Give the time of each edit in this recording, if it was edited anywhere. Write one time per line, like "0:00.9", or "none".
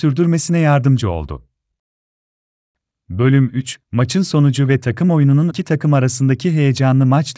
0:05.5